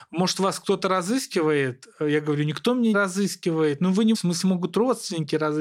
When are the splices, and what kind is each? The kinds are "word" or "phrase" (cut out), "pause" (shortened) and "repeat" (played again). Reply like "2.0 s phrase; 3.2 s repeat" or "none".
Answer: 2.9 s word; 4.1 s word

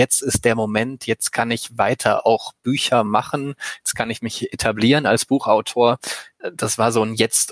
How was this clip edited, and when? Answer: none

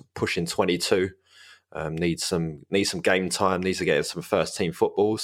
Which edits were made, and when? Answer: none

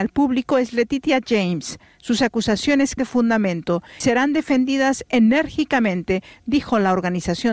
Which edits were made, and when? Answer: 3.0 s word; 4.0 s word

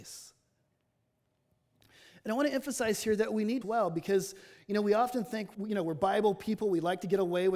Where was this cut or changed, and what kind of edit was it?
3.6 s phrase; 5.5 s word

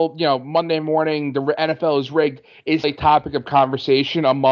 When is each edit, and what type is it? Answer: 2.8 s word

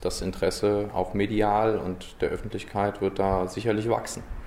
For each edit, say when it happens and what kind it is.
none

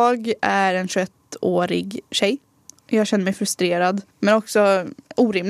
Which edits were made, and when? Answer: 2.1 s pause; 4.1 s pause

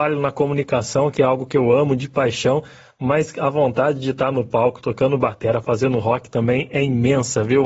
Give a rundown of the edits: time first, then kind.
none

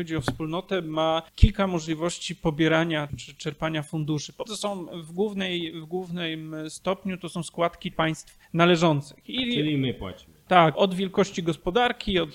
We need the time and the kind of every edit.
1.3 s pause; 3.1 s word; 4.5 s word; 7.9 s word; 8.4 s pause; 10.7 s word

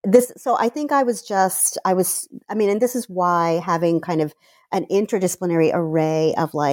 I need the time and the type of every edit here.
none

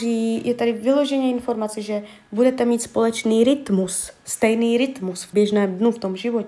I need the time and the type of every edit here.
5.3 s word

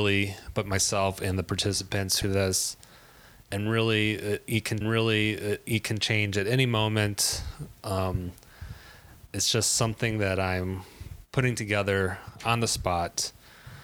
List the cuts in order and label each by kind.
2.2 s phrase; 4.8 s repeat

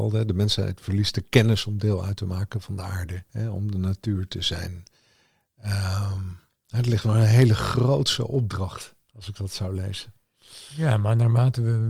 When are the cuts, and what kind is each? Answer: 3.3 s pause

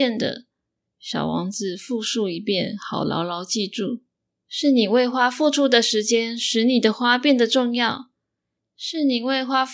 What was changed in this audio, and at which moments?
none

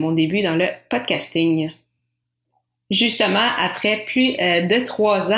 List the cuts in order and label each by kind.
none

